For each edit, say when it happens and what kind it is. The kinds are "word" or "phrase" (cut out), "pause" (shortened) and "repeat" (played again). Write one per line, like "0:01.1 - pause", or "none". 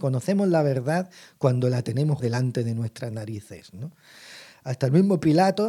0:02.2 - word